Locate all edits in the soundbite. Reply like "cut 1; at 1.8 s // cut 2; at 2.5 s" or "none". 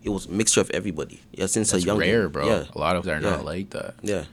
cut 1; at 1.2 s // cut 2; at 3.0 s